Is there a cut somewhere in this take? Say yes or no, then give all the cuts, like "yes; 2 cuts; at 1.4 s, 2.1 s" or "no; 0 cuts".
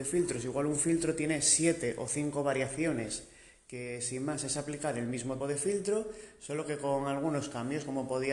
yes; 1 cut; at 5.4 s